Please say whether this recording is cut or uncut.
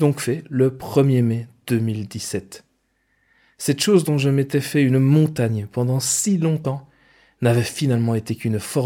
uncut